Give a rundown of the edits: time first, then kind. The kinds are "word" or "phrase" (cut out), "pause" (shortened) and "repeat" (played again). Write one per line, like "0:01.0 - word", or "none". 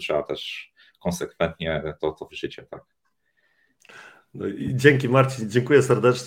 0:02.3 - word